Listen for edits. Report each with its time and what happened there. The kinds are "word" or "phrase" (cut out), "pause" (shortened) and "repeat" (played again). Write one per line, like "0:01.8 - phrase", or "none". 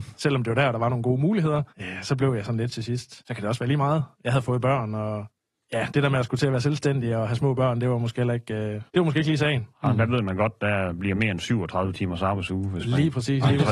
0:01.7 - pause
0:03.2 - pause
0:04.1 - pause
0:05.4 - pause
0:08.9 - pause
0:09.7 - pause